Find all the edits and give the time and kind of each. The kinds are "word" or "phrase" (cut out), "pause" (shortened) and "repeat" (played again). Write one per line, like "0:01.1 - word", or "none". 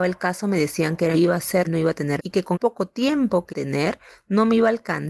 0:01.1 - phrase
0:01.6 - word
0:02.2 - word
0:02.5 - word
0:03.5 - phrase